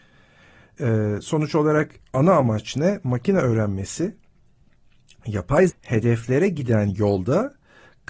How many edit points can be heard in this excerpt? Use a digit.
1